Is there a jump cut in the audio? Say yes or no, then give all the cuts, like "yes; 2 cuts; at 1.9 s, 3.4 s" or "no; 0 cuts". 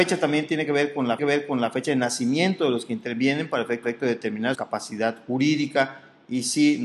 yes; 3 cuts; at 1.2 s, 3.8 s, 4.5 s